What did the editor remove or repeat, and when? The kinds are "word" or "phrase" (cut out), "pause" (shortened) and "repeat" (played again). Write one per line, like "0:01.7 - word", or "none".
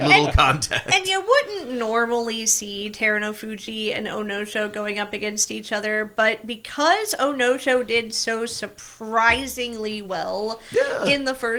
none